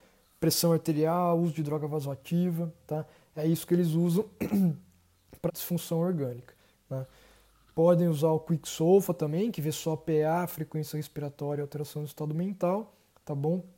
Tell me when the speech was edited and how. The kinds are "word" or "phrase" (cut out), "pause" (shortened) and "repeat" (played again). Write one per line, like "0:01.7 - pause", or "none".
0:05.5 - word